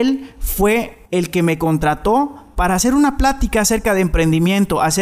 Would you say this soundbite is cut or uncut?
cut